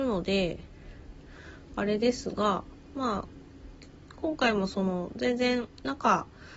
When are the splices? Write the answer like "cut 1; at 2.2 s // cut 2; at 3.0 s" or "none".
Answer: none